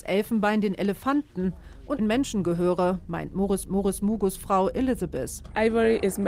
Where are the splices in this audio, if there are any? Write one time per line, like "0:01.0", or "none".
0:02.0
0:03.6